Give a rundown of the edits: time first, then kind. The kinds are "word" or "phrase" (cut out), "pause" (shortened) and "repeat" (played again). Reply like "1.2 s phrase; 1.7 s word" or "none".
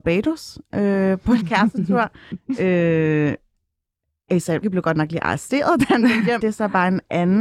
1.4 s word; 4.6 s word; 6.4 s word